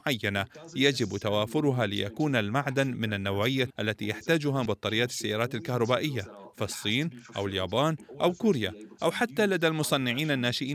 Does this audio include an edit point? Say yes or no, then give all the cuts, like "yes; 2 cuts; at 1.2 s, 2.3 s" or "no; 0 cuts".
yes; 2 cuts; at 3.7 s, 4.7 s